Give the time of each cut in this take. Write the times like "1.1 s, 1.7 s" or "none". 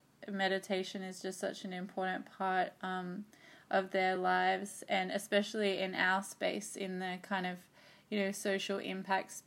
none